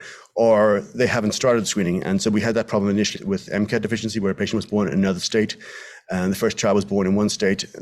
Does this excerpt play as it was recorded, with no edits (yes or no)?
no